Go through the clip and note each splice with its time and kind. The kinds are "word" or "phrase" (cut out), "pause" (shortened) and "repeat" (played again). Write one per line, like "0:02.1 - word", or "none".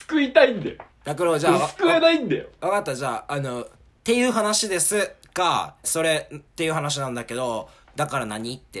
0:00.9 - pause
0:03.8 - pause
0:05.8 - word
0:06.5 - pause
0:07.8 - pause